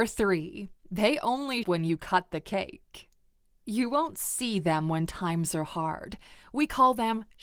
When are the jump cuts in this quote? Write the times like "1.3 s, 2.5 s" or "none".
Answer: 1.6 s